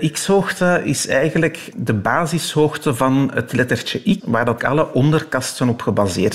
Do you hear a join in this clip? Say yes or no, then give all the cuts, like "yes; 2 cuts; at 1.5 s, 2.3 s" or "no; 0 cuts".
yes; 3 cuts; at 1.7 s, 4.2 s, 4.6 s